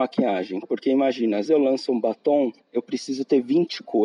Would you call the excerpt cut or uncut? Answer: cut